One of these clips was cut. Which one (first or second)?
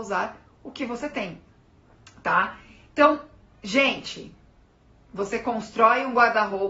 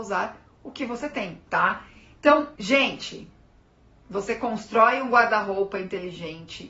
second